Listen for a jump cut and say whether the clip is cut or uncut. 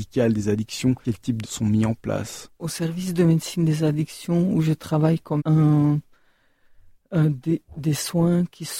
cut